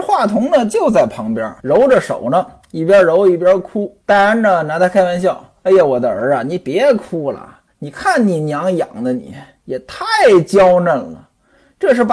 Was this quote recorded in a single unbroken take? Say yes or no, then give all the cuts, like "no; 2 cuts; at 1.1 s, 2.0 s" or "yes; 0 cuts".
no; 3 cuts; at 1.6 s, 4.0 s, 7.7 s